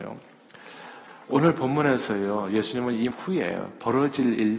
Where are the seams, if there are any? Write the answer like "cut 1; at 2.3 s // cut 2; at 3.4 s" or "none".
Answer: cut 1; at 3.1 s